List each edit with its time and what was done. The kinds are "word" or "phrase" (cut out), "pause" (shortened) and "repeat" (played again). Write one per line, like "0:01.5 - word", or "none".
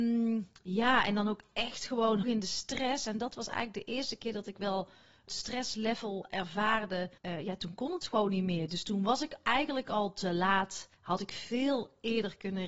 0:02.2 - word
0:05.3 - word
0:07.2 - pause
0:10.9 - pause